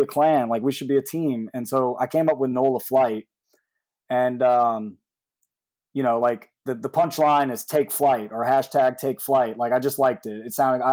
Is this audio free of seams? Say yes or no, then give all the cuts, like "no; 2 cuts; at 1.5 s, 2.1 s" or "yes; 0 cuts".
yes; 0 cuts